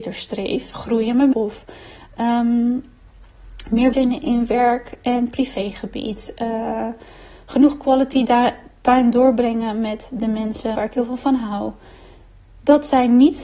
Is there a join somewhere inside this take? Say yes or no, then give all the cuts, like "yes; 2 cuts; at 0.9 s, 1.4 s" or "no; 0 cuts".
yes; 3 cuts; at 1.3 s, 3.9 s, 10.7 s